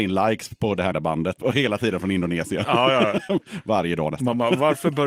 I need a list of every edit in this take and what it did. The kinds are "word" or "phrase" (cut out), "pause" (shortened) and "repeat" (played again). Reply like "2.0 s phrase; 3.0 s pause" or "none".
0.9 s word